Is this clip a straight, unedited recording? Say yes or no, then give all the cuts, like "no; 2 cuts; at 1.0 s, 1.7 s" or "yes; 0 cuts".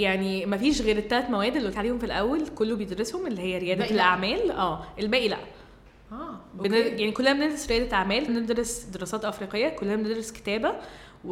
no; 2 cuts; at 1.7 s, 8.3 s